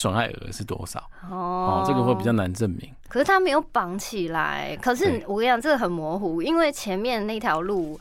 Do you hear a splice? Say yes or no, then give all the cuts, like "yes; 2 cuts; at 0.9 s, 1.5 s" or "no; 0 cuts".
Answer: no; 0 cuts